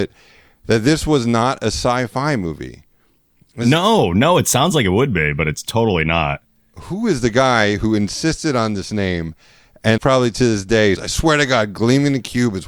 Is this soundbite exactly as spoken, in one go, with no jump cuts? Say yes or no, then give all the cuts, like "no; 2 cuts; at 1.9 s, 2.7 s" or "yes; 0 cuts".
no; 2 cuts; at 10.0 s, 11.0 s